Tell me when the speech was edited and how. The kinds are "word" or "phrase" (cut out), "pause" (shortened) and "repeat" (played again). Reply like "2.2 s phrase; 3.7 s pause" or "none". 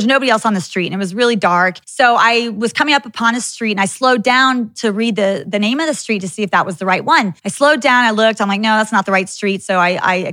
1.8 s pause; 7.4 s pause